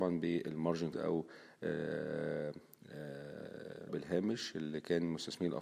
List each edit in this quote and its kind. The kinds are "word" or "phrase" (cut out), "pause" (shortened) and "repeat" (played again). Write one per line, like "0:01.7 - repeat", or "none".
0:00.9 - word
0:03.9 - word

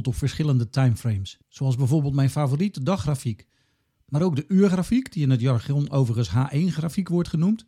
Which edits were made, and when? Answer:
0:01.4 - pause

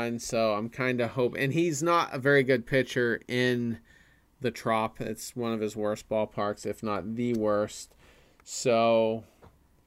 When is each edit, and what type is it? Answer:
none

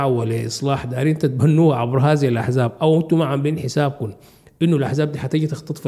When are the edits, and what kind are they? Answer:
none

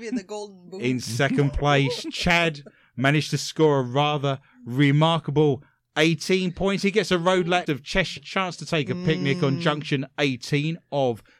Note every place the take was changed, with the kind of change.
0:07.7 - word
0:08.2 - word

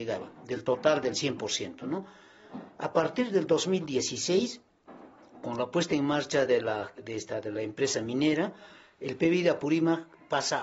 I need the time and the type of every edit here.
none

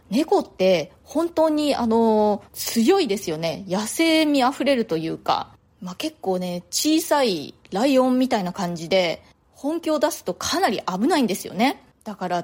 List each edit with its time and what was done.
0:02.5 - pause

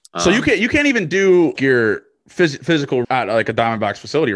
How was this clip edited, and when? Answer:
0:01.6 - word
0:03.0 - word

